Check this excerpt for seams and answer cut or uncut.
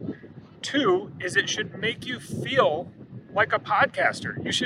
uncut